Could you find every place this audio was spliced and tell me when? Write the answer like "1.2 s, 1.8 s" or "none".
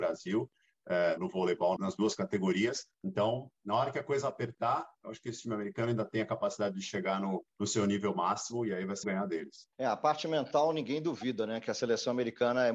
1.2 s, 1.8 s, 2.9 s, 7.5 s, 9.0 s, 9.7 s